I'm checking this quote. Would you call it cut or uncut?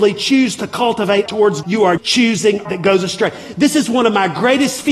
cut